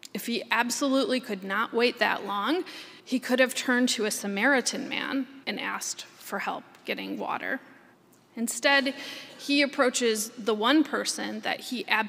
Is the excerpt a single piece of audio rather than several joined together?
no; 3 cuts; at 3.0 s, 5.4 s, 7.9 s

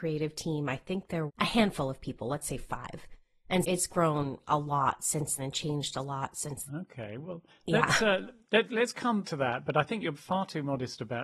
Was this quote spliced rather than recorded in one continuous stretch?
yes; 7 cuts; at 1.3 s, 3.6 s, 5.4 s, 6.7 s, 8.6 s, 9.2 s, 10.1 s

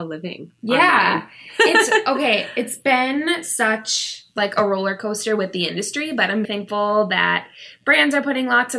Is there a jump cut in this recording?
yes; 1 cut; at 6.4 s

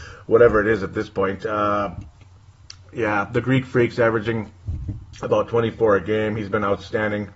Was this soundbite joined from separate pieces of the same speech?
no; 0 cuts

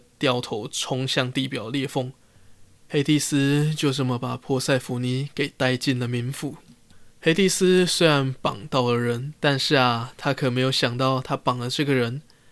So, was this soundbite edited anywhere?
yes; 2 cuts; at 7.1 s, 9.4 s

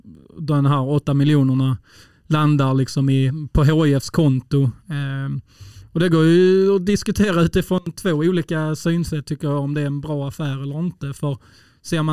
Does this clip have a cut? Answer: no; 0 cuts

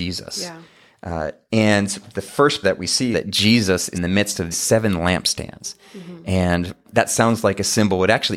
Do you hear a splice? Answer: yes; 5 cuts; at 2.6 s, 3.1 s, 3.9 s, 4.5 s, 6.8 s

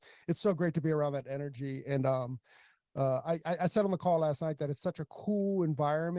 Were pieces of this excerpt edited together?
no; 0 cuts

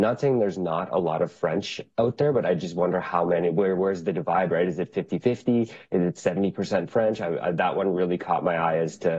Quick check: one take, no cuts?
yes; 0 cuts

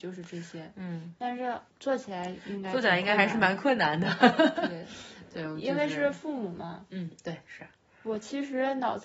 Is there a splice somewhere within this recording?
yes; 2 cuts; at 1.7 s, 7.6 s

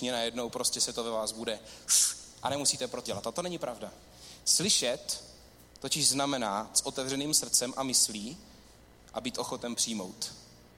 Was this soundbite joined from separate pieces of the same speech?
yes; 2 cuts; at 3.1 s, 6.7 s

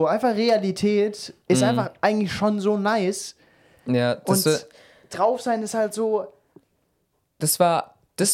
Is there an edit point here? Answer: no; 0 cuts

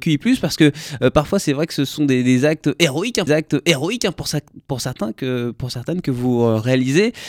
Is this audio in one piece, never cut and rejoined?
no; 1 cut; at 3.3 s

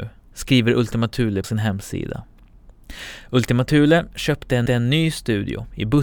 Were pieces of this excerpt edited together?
yes; 2 cuts; at 1.4 s, 4.7 s

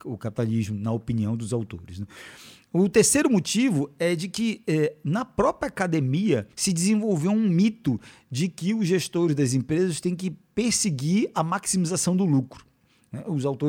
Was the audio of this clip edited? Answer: yes; 1 cut; at 6.5 s

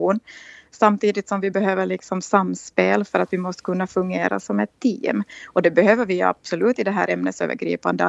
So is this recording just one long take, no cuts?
yes; 0 cuts

